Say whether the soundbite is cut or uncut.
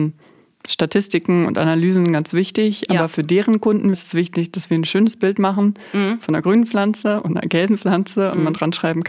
cut